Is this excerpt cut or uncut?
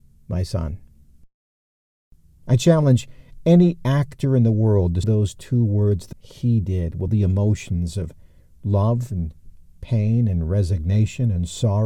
cut